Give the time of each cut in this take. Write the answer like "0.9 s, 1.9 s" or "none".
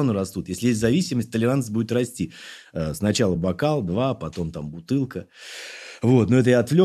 none